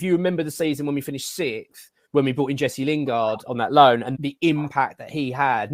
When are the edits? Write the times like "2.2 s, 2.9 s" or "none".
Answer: 2.1 s, 4.1 s